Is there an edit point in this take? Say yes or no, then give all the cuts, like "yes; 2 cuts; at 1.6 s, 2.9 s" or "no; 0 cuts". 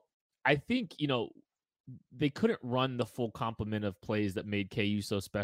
no; 0 cuts